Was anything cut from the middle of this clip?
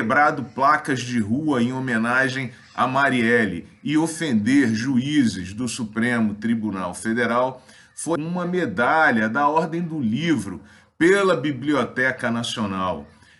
yes; 1 cut; at 8.2 s

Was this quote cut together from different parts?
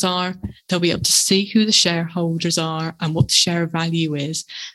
no; 0 cuts

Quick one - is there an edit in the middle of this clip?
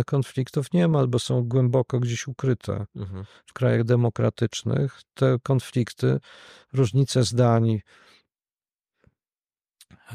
no; 0 cuts

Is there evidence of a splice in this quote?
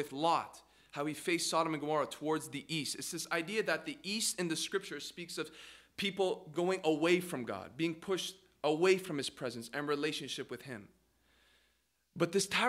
no; 0 cuts

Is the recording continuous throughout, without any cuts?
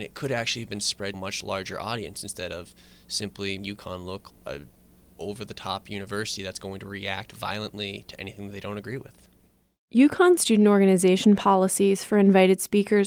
no; 4 cuts; at 1.1 s, 3.6 s, 4.3 s, 10.4 s

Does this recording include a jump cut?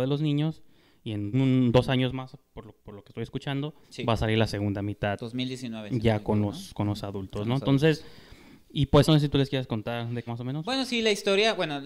yes; 5 cuts; at 1.3 s, 2.8 s, 3.8 s, 9.0 s, 10.3 s

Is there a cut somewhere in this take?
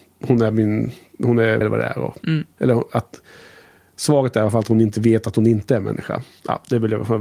yes; 1 cut; at 1.6 s

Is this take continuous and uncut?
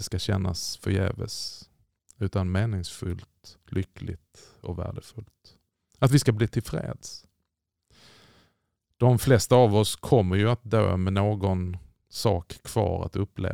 yes; 0 cuts

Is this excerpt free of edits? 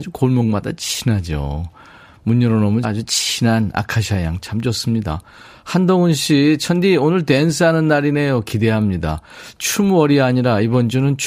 no; 1 cut; at 2.8 s

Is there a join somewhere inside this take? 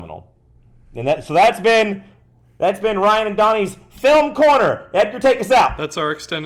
no; 0 cuts

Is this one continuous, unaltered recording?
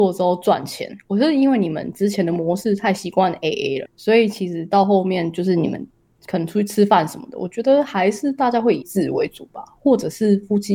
no; 2 cuts; at 3.9 s, 8.8 s

